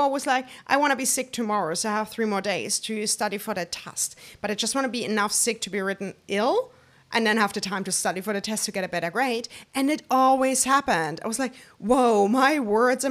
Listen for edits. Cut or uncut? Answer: uncut